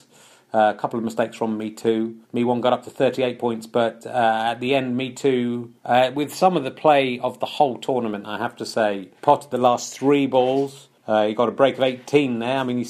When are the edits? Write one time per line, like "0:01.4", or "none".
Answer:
0:02.2
0:05.8
0:09.2
0:11.0